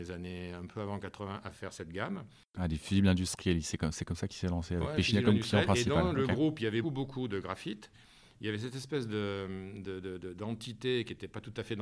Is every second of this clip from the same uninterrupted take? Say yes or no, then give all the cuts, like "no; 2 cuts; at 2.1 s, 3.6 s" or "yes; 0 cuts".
no; 1 cut; at 6.8 s